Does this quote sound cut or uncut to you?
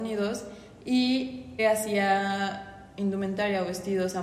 cut